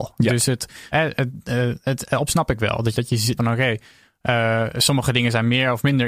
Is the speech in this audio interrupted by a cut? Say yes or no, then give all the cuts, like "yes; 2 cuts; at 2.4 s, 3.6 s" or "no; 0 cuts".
yes; 4 cuts; at 0.9 s, 2.3 s, 2.9 s, 3.4 s